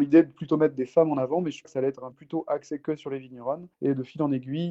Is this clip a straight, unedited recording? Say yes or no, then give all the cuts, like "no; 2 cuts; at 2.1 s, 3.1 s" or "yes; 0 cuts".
no; 3 cuts; at 1.6 s, 2.1 s, 3.7 s